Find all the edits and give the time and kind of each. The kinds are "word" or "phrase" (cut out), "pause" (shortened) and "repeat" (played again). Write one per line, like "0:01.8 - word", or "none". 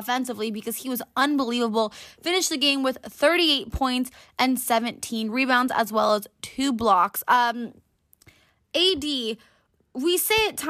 none